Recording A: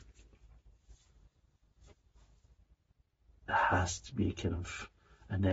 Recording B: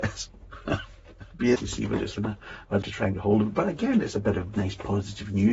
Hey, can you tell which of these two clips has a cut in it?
B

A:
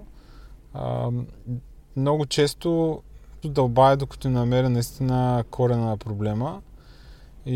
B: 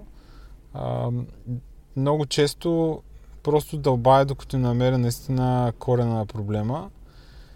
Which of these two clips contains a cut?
A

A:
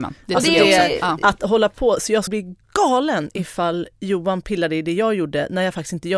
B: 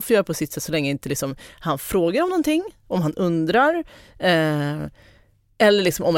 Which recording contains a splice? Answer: A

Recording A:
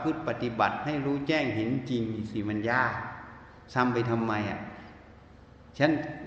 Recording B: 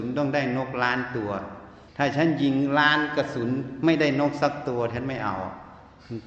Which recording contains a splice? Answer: B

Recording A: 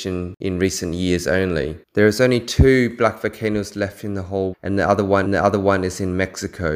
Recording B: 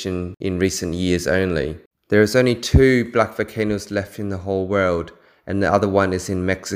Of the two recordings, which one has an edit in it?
A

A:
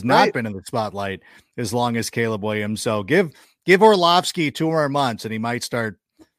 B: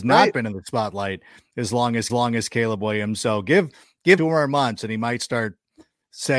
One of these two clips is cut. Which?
B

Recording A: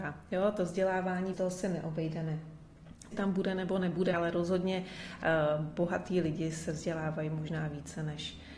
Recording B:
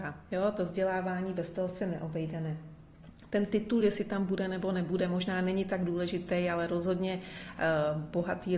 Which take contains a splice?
A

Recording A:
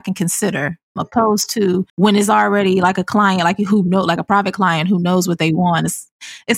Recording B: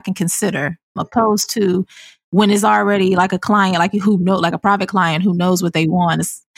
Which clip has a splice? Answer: A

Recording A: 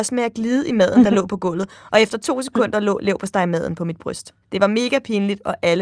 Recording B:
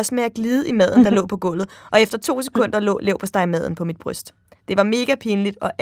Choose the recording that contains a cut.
A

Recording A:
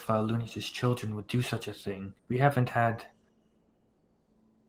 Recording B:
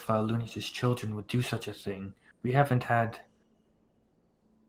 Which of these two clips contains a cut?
A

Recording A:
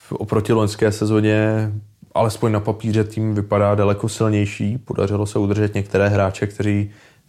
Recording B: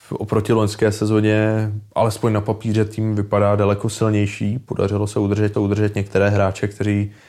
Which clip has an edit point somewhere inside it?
B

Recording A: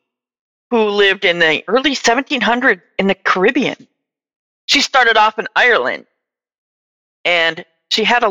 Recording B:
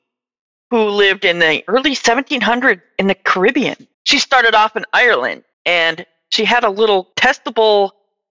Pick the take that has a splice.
B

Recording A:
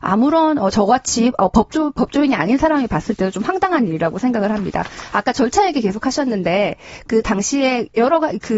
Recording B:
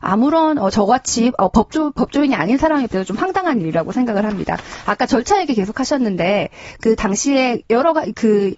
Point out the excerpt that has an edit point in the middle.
B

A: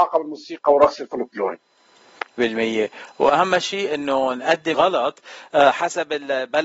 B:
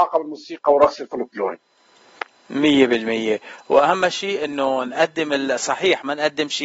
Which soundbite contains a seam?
A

